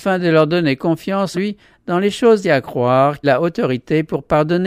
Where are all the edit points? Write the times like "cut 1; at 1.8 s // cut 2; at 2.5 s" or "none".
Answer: cut 1; at 1.3 s // cut 2; at 2.4 s // cut 3; at 3.2 s